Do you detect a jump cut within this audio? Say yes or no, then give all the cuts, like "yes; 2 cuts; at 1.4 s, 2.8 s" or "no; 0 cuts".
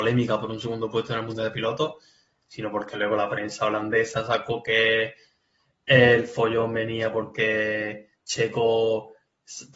no; 0 cuts